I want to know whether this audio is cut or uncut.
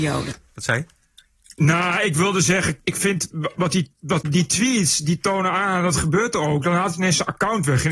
cut